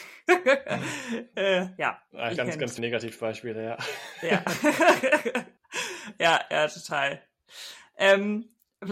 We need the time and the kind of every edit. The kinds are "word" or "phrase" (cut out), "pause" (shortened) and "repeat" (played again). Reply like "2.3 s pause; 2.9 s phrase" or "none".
2.4 s phrase; 2.8 s word; 5.6 s pause